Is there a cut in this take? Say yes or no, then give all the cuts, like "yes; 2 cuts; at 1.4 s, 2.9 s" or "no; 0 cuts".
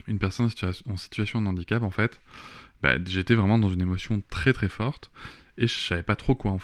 no; 0 cuts